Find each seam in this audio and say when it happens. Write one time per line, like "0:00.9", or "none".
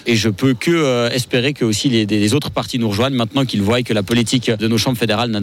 none